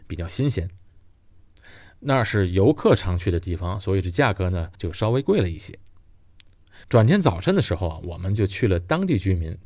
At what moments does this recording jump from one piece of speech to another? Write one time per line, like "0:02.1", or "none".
0:04.7
0:06.8